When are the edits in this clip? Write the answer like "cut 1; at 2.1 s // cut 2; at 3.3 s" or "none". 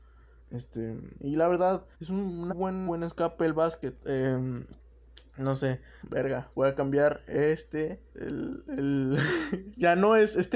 cut 1; at 1.9 s // cut 2; at 2.5 s // cut 3; at 2.9 s // cut 4; at 6.0 s // cut 5; at 8.1 s